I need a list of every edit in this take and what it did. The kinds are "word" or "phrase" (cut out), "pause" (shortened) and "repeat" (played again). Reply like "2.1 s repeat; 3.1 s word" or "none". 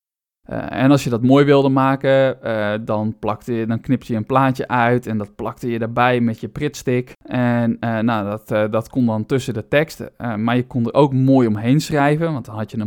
7.2 s pause